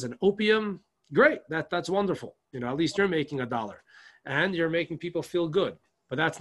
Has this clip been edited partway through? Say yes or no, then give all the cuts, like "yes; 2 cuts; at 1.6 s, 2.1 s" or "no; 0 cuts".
no; 0 cuts